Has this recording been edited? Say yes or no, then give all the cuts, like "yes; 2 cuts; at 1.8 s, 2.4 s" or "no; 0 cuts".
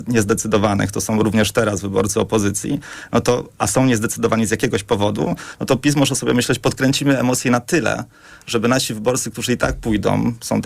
no; 0 cuts